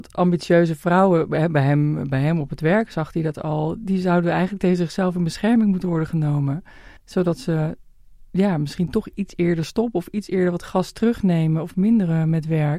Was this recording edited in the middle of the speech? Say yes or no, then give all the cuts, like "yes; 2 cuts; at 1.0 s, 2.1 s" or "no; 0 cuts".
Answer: yes; 1 cut; at 7.0 s